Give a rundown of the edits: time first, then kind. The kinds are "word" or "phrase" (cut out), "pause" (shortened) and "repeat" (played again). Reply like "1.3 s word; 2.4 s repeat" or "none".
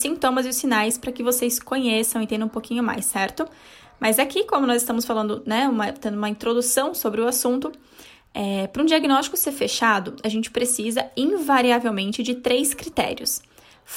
none